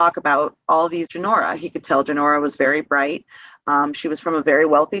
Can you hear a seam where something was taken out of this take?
yes; 1 cut; at 1.1 s

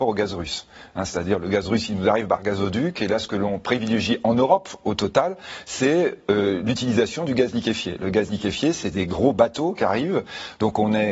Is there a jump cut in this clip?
no; 0 cuts

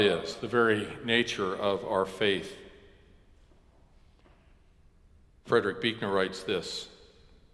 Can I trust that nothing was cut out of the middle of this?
yes; 0 cuts

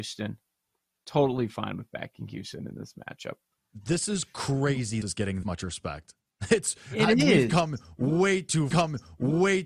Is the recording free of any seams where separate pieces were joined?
no; 3 cuts; at 5.0 s, 5.4 s, 8.7 s

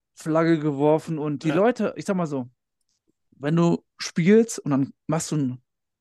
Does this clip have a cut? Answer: no; 0 cuts

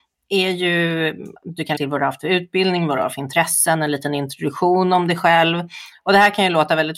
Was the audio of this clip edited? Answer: yes; 2 cuts; at 1.4 s, 1.8 s

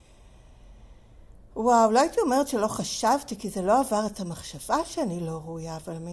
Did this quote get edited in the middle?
no; 0 cuts

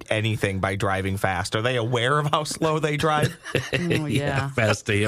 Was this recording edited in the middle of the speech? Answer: no; 0 cuts

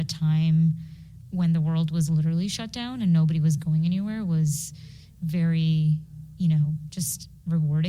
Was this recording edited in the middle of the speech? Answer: no; 0 cuts

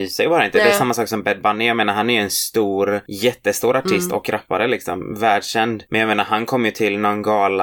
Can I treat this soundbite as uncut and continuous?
yes; 0 cuts

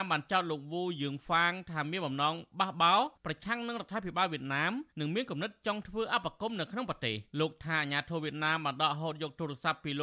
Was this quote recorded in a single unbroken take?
no; 3 cuts; at 3.1 s, 4.9 s, 7.3 s

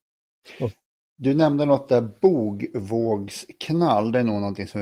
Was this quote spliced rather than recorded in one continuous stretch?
no; 0 cuts

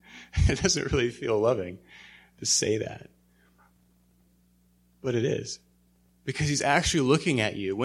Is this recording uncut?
yes; 0 cuts

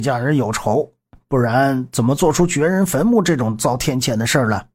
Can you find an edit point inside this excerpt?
no; 0 cuts

